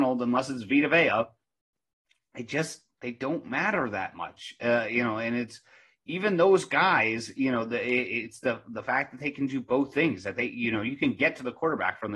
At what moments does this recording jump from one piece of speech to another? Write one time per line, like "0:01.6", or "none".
0:02.9

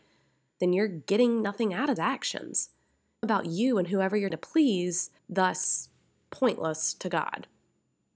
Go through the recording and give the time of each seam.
0:02.0
0:03.2
0:04.3
0:05.2

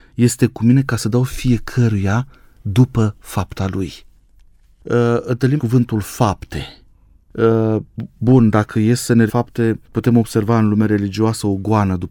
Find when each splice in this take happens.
0:05.6
0:09.3
0:09.8

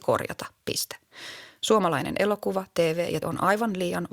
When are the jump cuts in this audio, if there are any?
0:03.2

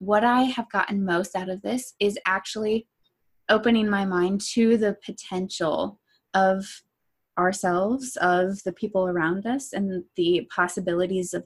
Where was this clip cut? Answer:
none

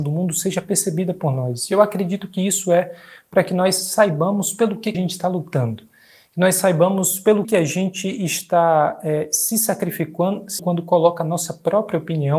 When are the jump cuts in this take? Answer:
0:04.9
0:07.4
0:10.6

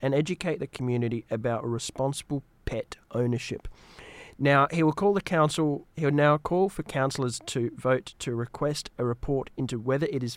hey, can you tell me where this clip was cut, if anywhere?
0:03.0
0:05.9

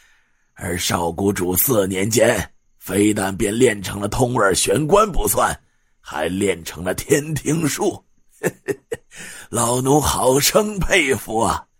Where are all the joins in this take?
none

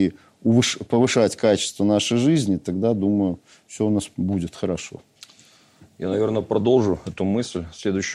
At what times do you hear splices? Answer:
none

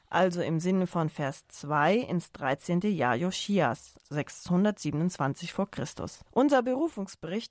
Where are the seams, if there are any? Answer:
0:04.0
0:06.3

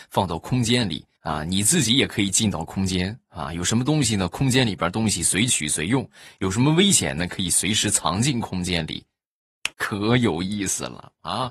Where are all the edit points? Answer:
0:01.2
0:09.7

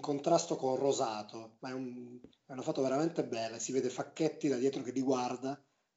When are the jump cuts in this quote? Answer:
none

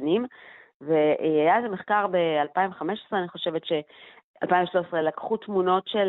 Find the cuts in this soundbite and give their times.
none

